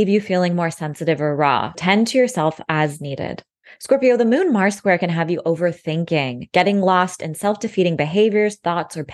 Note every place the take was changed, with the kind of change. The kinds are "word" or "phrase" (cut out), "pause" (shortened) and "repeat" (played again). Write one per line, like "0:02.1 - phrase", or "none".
0:01.7 - word